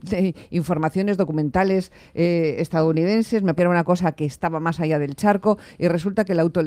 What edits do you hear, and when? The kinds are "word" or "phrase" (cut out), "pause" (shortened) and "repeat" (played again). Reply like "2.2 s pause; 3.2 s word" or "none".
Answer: 3.6 s word